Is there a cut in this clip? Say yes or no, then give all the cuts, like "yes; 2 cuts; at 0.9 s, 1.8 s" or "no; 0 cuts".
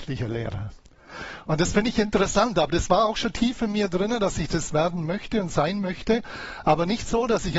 no; 0 cuts